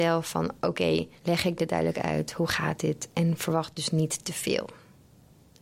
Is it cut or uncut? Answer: cut